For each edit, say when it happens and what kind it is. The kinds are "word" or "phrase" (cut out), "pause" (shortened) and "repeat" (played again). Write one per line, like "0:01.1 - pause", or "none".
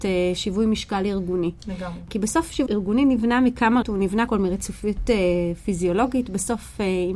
0:02.7 - word
0:03.8 - word
0:04.3 - word